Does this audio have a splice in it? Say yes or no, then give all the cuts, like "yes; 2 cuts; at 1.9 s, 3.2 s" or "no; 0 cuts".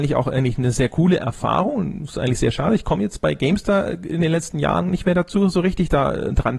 no; 0 cuts